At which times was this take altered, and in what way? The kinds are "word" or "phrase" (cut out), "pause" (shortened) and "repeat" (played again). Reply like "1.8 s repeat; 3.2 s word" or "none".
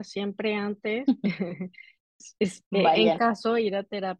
3.2 s word